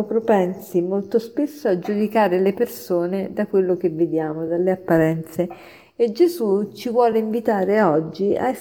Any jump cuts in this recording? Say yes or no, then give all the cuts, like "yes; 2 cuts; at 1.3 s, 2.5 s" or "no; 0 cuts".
no; 0 cuts